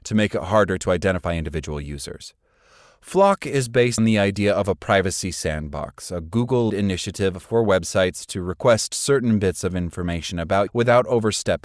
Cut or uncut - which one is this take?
cut